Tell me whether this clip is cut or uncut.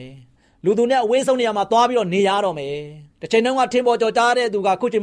cut